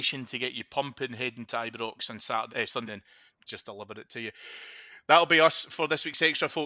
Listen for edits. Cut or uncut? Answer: cut